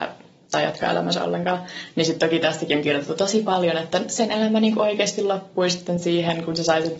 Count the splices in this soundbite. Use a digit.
0